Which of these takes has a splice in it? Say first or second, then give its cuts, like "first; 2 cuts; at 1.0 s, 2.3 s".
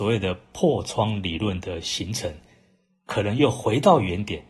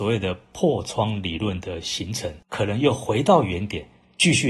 second; 1 cut; at 2.4 s